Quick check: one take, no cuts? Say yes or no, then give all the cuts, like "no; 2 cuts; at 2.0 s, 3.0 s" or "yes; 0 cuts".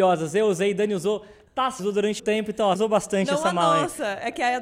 no; 3 cuts; at 1.8 s, 2.2 s, 2.7 s